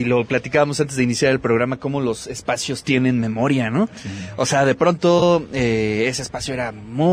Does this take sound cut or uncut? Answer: uncut